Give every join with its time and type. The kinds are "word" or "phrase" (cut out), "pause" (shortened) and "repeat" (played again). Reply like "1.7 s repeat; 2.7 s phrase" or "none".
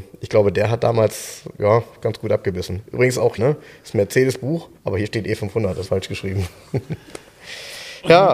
3.4 s word; 4.8 s pause; 5.8 s phrase